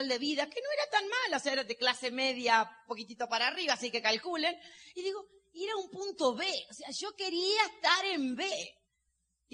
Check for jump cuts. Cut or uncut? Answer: uncut